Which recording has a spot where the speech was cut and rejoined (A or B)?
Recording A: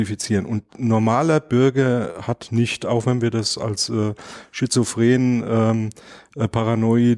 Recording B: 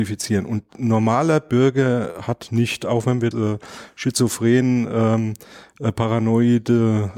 B